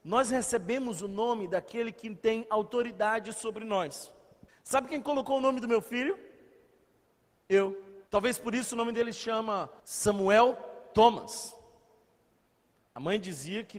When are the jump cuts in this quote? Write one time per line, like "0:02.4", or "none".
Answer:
0:04.5
0:08.1
0:09.8